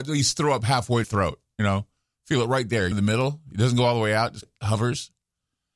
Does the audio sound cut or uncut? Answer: cut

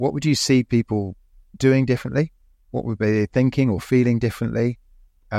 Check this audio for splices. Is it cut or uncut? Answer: uncut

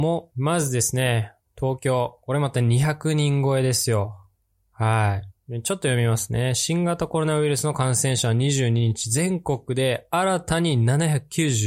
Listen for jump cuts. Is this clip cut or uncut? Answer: uncut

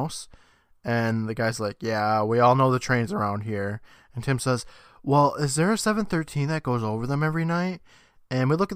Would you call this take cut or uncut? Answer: uncut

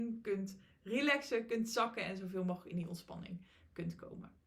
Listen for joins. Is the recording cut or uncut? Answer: uncut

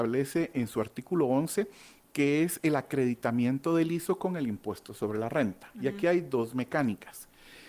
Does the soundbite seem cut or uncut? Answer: uncut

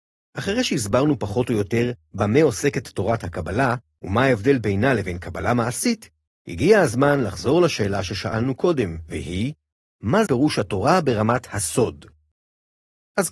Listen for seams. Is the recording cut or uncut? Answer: cut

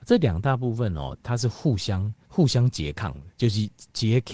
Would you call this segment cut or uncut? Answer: cut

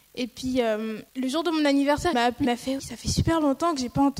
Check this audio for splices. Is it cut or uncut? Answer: cut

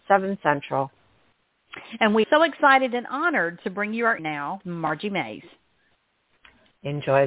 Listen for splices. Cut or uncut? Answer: cut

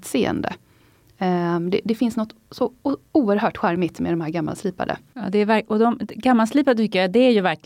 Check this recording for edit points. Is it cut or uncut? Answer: uncut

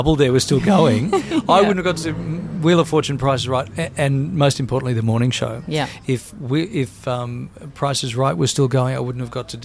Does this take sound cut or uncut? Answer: uncut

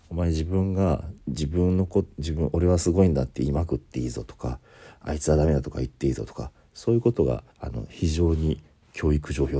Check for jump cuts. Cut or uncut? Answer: cut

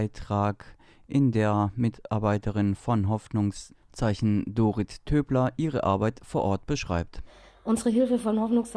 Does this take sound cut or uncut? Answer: uncut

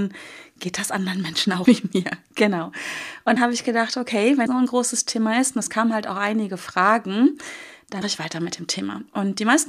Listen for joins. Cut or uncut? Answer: cut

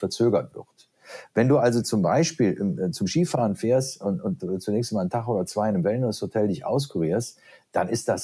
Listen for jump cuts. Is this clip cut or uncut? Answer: uncut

